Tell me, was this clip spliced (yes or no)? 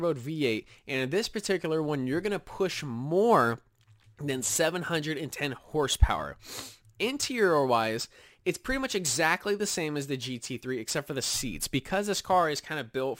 no